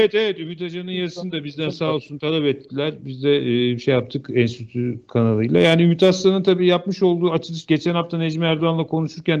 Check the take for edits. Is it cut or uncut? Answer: uncut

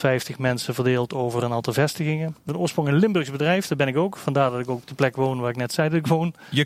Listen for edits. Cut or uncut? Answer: cut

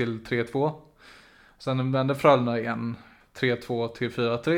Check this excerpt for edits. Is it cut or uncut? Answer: uncut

